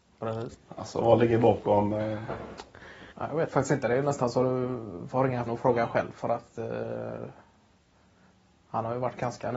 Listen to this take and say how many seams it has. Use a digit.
2